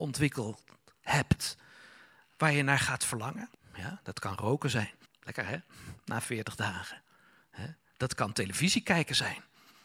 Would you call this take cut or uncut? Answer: cut